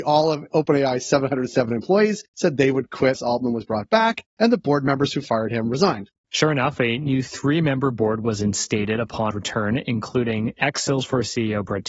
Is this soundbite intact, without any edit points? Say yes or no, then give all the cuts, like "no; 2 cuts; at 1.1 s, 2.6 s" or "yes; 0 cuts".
no; 2 cuts; at 3.1 s, 9.3 s